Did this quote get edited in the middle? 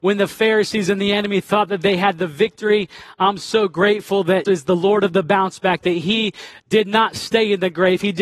yes; 1 cut; at 4.4 s

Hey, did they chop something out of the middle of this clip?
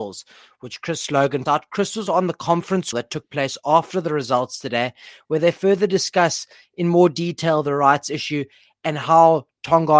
yes; 3 cuts; at 1.5 s, 2.1 s, 2.9 s

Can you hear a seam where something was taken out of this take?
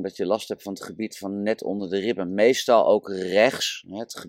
no; 0 cuts

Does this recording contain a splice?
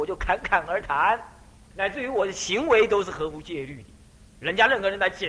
yes; 1 cut; at 1.7 s

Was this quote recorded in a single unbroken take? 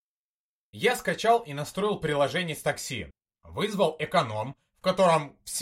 yes; 0 cuts

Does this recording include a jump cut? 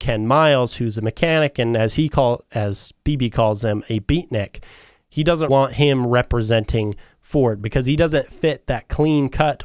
yes; 1 cut; at 5.5 s

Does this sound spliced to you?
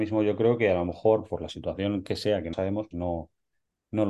yes; 2 cuts; at 2.5 s, 2.9 s

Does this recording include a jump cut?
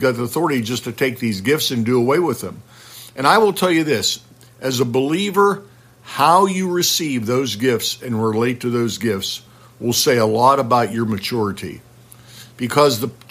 no; 0 cuts

